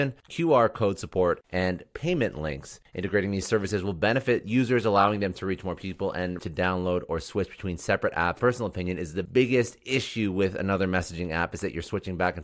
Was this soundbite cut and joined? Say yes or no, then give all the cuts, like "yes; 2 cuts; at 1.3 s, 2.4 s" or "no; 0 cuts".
yes; 3 cuts; at 6.4 s, 8.4 s, 9.2 s